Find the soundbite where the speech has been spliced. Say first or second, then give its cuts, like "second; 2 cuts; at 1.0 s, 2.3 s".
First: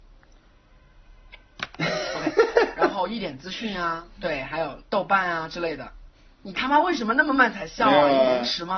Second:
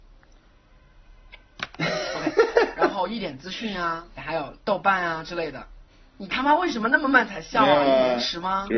second; 1 cut; at 4.2 s